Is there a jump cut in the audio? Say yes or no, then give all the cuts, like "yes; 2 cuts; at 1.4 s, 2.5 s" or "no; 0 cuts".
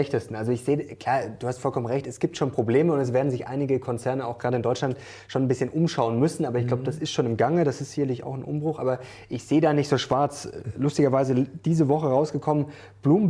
no; 0 cuts